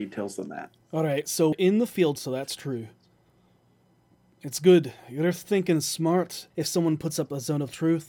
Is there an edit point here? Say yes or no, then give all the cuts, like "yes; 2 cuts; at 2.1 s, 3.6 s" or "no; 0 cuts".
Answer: yes; 3 cuts; at 1.5 s, 2.2 s, 6.5 s